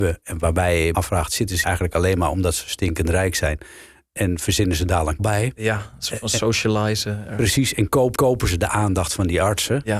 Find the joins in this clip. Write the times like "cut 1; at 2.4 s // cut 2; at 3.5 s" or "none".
cut 1; at 0.9 s // cut 2; at 1.6 s // cut 3; at 5.2 s // cut 4; at 8.2 s